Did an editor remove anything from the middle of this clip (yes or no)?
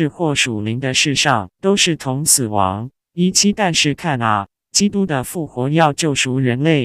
yes